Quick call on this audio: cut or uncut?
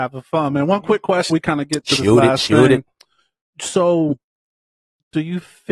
cut